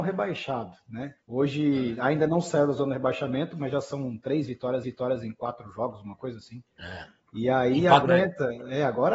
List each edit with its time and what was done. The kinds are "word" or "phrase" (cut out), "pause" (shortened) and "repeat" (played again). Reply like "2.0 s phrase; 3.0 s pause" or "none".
1.2 s pause; 4.8 s repeat; 8.1 s phrase